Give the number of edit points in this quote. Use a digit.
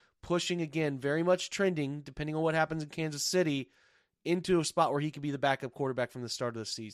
0